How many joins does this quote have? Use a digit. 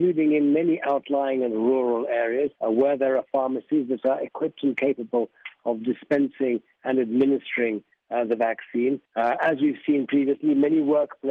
2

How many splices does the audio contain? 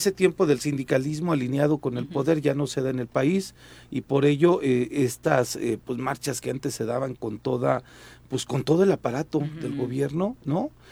0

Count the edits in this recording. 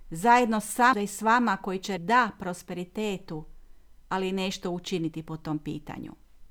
2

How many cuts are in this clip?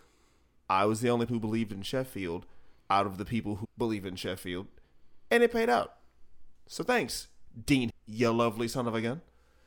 4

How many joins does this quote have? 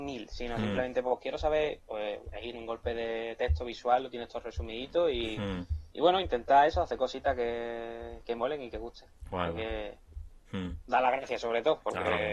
1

